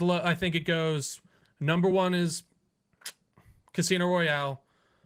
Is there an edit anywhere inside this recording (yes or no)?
no